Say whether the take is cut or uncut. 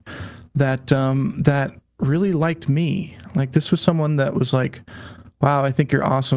uncut